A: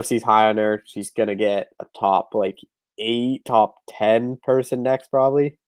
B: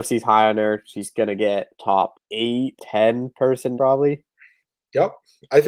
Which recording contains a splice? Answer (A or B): B